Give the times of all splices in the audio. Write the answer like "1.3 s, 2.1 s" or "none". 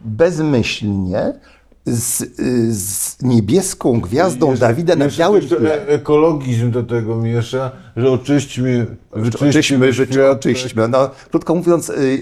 none